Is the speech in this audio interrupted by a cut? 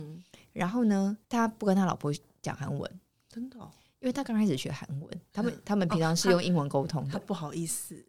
yes; 2 cuts; at 1.2 s, 3.1 s

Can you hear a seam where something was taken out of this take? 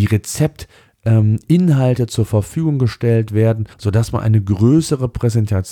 yes; 1 cut; at 3.7 s

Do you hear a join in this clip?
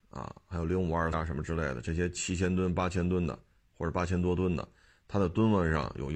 yes; 1 cut; at 1.1 s

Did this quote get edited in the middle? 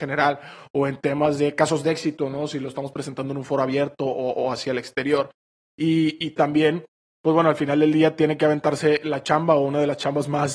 no; 0 cuts

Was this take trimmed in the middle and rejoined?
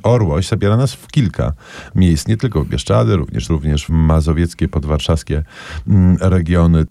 yes; 2 cuts; at 3.5 s, 3.9 s

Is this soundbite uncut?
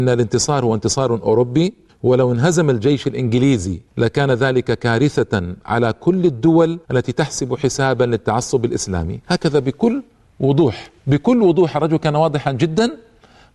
no; 5 cuts; at 1.9 s, 3.9 s, 6.8 s, 9.2 s, 11.0 s

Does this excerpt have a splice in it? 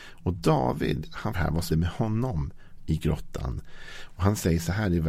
yes; 2 cuts; at 1.3 s, 1.7 s

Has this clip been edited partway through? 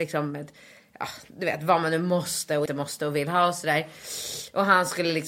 yes; 1 cut; at 2.7 s

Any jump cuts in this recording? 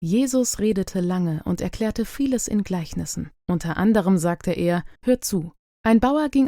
yes; 3 cuts; at 3.4 s, 4.9 s, 5.6 s

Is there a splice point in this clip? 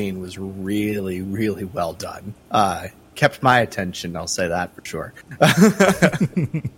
yes; 1 cut; at 2.4 s

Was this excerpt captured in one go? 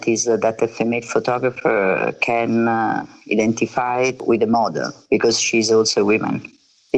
yes; 0 cuts

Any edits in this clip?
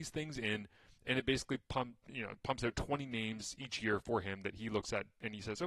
no; 0 cuts

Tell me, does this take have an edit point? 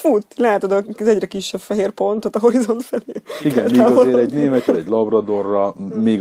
yes; 1 cut; at 4.7 s

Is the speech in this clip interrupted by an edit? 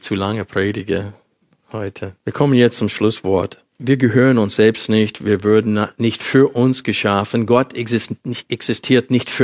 yes; 2 cuts; at 2.2 s, 3.7 s

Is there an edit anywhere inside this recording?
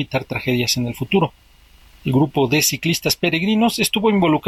no; 0 cuts

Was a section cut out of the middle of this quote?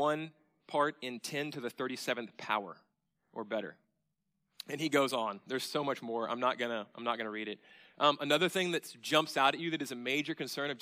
no; 0 cuts

